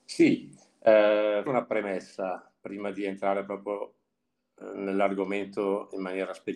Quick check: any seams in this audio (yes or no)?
yes